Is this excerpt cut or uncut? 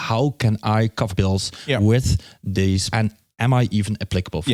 cut